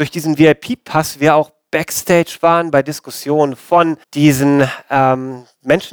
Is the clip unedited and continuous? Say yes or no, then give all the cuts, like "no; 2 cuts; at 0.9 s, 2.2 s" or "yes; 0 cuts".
no; 1 cut; at 4.0 s